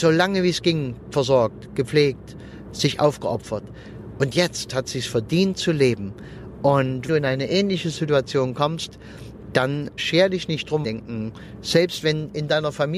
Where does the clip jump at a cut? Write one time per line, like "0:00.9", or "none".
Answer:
0:07.1
0:10.0
0:10.8